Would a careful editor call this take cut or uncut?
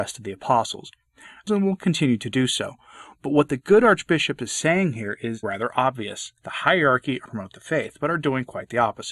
cut